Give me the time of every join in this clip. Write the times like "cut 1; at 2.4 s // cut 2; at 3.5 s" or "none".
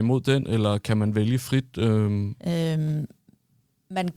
cut 1; at 2.4 s

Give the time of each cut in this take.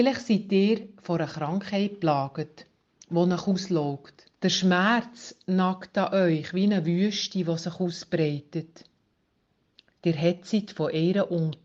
cut 1; at 4.4 s

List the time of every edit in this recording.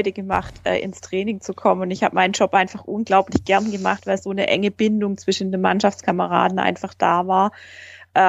none

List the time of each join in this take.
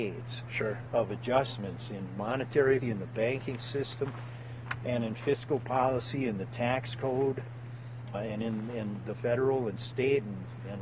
cut 1; at 2.8 s // cut 2; at 8.1 s // cut 3; at 9.1 s

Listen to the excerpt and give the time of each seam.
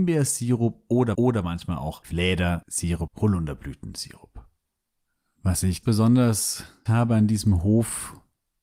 cut 1; at 1.1 s // cut 2; at 2.0 s // cut 3; at 3.1 s // cut 4; at 5.8 s // cut 5; at 6.9 s

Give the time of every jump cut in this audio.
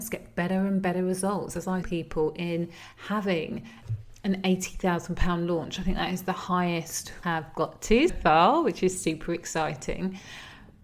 cut 1; at 1.8 s // cut 2; at 7.2 s // cut 3; at 8.1 s

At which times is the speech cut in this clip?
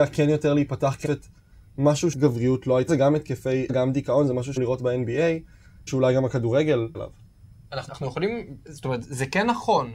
cut 1; at 1.0 s // cut 2; at 2.1 s // cut 3; at 2.9 s // cut 4; at 3.7 s // cut 5; at 4.6 s // cut 6; at 5.9 s // cut 7; at 6.9 s // cut 8; at 7.9 s

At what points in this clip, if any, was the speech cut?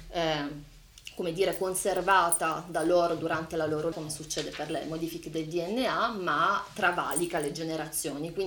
cut 1; at 3.9 s

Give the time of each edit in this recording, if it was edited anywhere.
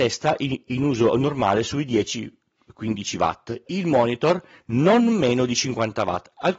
cut 1; at 3.7 s

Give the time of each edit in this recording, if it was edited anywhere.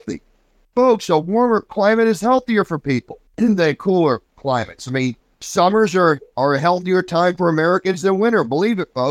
cut 1; at 3.3 s // cut 2; at 5.2 s

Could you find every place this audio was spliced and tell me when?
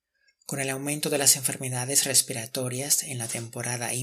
none

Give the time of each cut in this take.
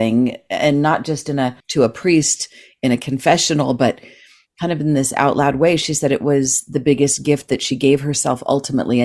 cut 1; at 1.6 s

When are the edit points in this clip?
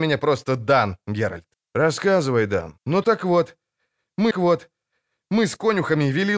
cut 1; at 1.5 s // cut 2; at 2.8 s // cut 3; at 4.3 s

